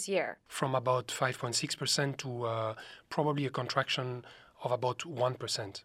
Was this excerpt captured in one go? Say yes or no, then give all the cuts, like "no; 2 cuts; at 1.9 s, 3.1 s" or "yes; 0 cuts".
yes; 0 cuts